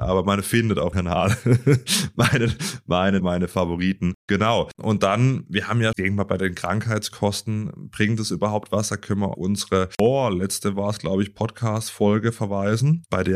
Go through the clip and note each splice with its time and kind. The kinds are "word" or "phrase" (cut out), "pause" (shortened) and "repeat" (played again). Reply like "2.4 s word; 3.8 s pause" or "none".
0.9 s word; 3.2 s word; 5.9 s word; 9.3 s word